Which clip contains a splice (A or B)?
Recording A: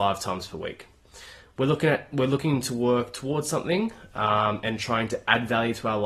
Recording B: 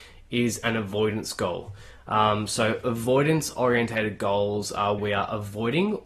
B